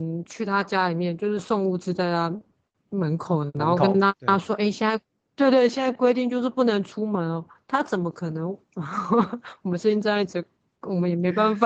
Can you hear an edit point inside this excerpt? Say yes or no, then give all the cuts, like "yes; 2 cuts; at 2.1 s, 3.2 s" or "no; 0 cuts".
no; 0 cuts